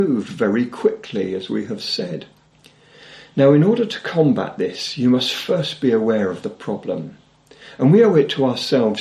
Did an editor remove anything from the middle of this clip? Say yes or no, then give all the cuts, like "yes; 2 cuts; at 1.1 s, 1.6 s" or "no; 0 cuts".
no; 0 cuts